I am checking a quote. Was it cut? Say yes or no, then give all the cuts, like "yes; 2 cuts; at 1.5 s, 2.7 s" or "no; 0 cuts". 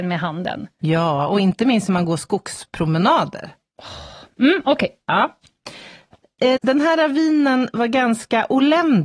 yes; 1 cut; at 6.6 s